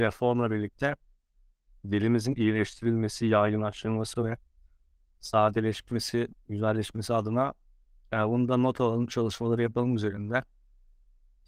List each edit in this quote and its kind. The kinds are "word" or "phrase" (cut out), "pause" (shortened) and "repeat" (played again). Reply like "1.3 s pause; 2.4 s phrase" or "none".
none